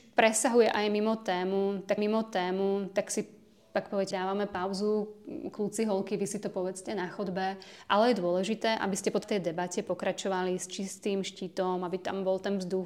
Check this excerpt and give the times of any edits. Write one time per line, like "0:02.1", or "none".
0:02.0
0:04.1
0:09.2